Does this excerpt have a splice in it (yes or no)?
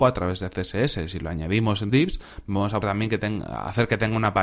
yes